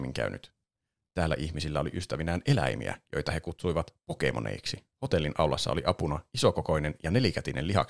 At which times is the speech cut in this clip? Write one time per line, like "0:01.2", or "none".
0:04.9

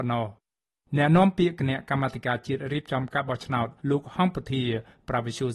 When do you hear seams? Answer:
0:03.8

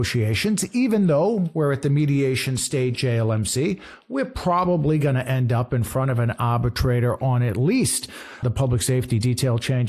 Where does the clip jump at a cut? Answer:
0:02.9
0:08.4

